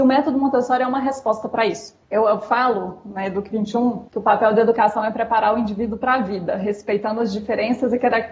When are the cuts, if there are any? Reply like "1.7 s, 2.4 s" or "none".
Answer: 2.0 s, 4.1 s